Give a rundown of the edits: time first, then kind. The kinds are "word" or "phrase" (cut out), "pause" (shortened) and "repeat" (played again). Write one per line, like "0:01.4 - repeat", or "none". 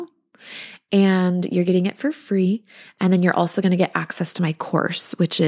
none